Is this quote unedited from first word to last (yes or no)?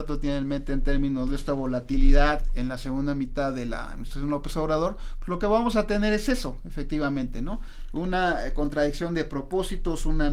yes